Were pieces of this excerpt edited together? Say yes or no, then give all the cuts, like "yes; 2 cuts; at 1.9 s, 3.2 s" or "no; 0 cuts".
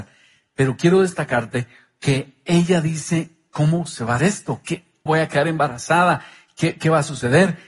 yes; 2 cuts; at 4.2 s, 5.1 s